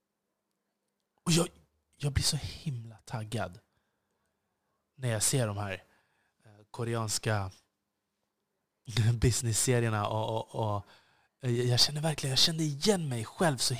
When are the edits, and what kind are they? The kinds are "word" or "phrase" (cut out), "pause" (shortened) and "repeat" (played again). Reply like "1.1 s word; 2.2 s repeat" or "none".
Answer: none